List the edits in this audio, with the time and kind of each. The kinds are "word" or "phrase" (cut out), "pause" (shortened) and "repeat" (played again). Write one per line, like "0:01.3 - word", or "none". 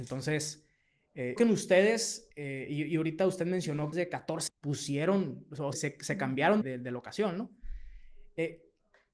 0:01.4 - phrase
0:02.3 - pause
0:03.9 - phrase
0:04.5 - word
0:05.7 - word
0:06.6 - word